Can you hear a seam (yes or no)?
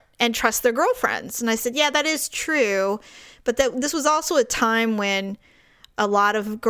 no